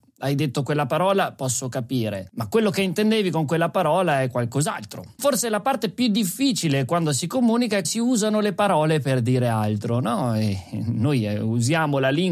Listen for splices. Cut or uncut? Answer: cut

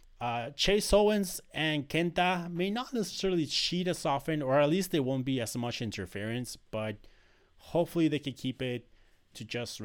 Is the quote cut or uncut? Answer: uncut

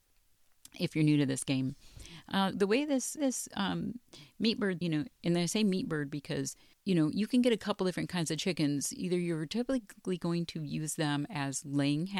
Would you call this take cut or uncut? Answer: cut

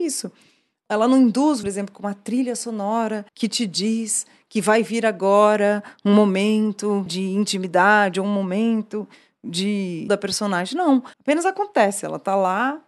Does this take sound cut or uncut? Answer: cut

